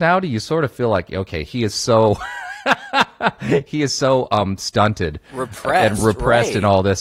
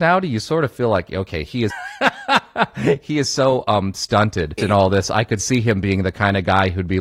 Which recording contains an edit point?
second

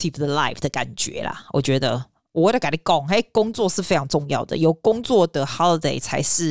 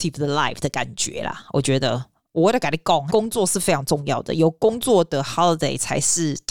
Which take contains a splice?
second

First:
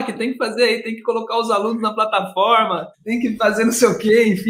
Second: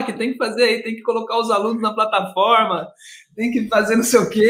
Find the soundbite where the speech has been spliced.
first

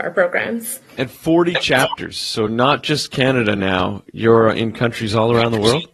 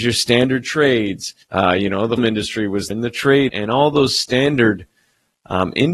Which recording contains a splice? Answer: second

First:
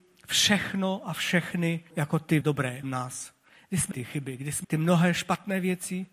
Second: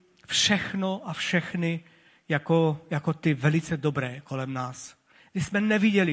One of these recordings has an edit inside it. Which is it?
first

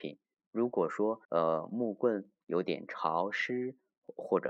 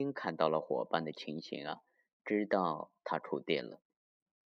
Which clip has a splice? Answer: first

